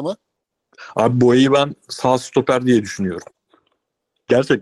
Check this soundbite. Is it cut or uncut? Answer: uncut